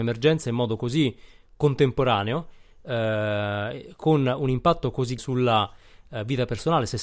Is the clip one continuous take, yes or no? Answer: no